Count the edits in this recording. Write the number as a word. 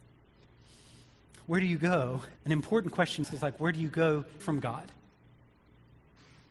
three